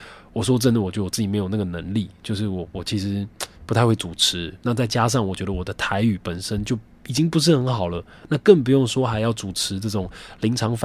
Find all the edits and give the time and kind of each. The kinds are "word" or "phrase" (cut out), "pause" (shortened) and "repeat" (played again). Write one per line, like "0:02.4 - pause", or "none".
none